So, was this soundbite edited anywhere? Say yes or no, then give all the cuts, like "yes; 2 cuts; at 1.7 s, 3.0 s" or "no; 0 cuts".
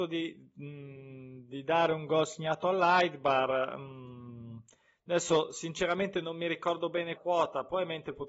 yes; 1 cut; at 7.2 s